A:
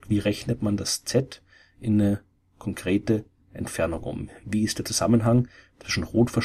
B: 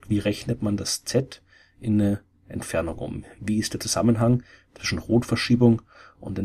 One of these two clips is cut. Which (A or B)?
B